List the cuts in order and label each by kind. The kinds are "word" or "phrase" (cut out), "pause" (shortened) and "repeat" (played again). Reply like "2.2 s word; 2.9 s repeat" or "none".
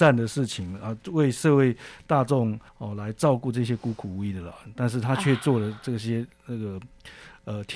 2.7 s pause